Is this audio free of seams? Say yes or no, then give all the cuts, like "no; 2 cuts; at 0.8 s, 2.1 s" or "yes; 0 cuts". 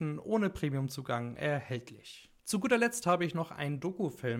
no; 1 cut; at 2.4 s